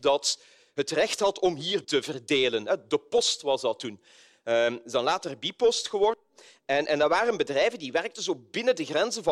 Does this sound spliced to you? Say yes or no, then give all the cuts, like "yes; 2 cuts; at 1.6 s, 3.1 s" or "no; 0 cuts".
yes; 1 cut; at 1.8 s